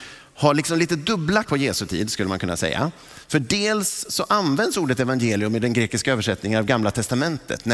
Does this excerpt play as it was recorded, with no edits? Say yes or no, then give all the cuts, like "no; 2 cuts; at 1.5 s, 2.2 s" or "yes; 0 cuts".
no; 1 cut; at 1.4 s